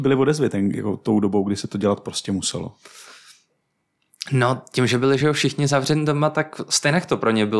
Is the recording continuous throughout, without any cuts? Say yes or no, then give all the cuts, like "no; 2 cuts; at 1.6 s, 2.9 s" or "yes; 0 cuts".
yes; 0 cuts